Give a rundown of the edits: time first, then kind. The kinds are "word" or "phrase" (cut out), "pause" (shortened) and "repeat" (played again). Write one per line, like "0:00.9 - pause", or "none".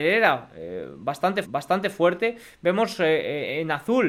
0:01.4 - repeat